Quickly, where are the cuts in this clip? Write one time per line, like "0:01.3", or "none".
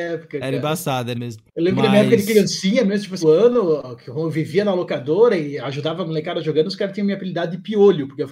0:01.1
0:01.5
0:03.2